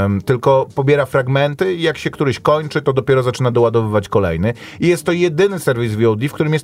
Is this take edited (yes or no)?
no